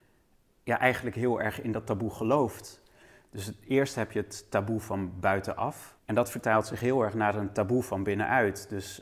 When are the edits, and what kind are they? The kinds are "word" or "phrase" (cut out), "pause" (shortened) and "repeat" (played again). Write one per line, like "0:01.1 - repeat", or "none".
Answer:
0:06.0 - pause